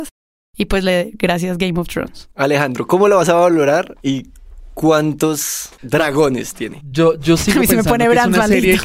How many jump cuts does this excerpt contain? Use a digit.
1